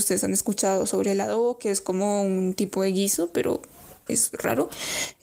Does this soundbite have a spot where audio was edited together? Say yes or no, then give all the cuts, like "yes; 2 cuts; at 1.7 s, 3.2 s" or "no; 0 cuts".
no; 0 cuts